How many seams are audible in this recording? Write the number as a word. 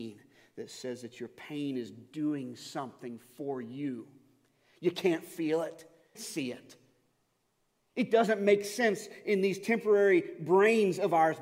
one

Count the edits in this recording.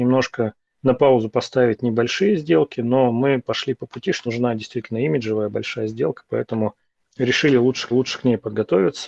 two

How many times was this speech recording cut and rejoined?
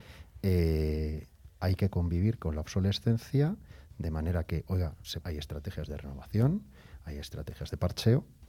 one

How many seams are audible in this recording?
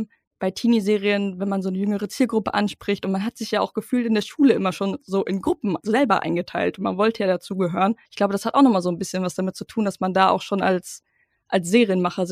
one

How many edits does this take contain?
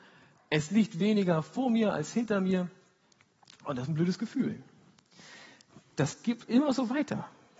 zero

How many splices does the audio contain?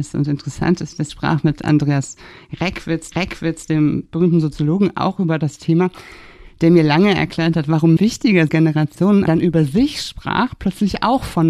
five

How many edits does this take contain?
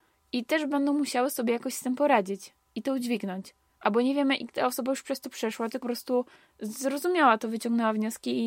three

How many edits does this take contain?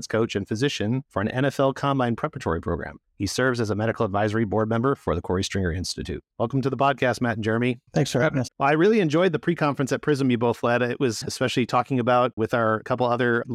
six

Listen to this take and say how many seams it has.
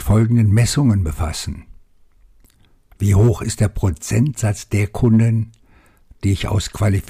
zero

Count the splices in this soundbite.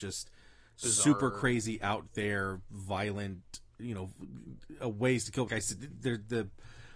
two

